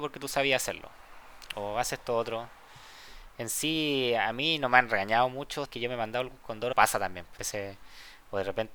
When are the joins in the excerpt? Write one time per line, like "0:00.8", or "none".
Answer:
0:05.6
0:06.7
0:07.4